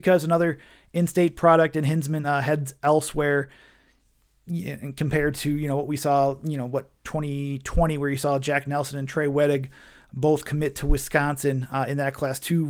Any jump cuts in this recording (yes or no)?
no